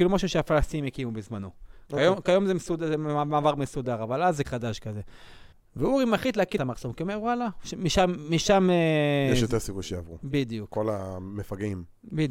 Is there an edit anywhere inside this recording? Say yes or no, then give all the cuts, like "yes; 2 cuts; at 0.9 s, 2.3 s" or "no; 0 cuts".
yes; 3 cuts; at 4.4 s, 5.5 s, 6.6 s